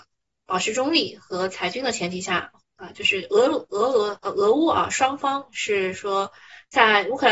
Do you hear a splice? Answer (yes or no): yes